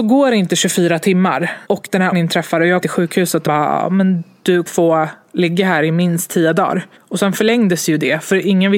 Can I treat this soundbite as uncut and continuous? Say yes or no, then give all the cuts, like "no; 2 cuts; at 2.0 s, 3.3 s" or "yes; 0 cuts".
no; 6 cuts; at 1.6 s, 2.1 s, 2.8 s, 3.5 s, 4.7 s, 7.0 s